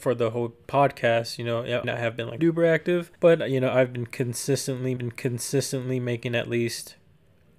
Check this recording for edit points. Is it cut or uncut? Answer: cut